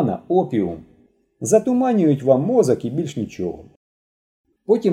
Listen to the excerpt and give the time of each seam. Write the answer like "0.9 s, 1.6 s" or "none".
none

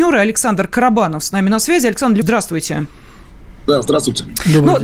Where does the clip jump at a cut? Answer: 2.2 s

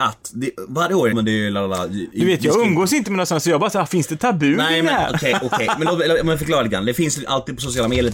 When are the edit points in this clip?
1.1 s

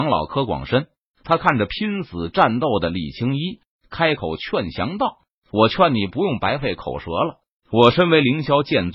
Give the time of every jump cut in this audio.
none

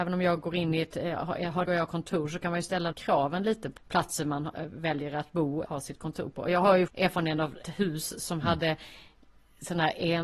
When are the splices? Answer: 1.7 s, 2.9 s, 3.8 s, 5.7 s, 6.9 s, 7.6 s

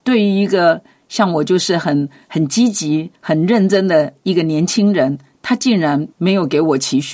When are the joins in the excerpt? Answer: 3.1 s, 6.1 s

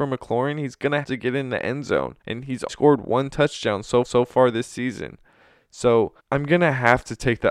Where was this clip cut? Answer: 1.0 s, 2.2 s, 2.7 s, 4.0 s, 6.2 s

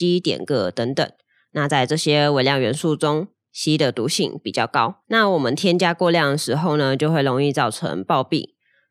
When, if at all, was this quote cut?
5.0 s

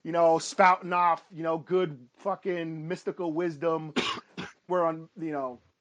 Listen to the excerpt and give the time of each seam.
2.1 s, 4.7 s

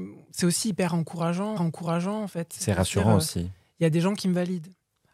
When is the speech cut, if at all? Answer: 1.6 s

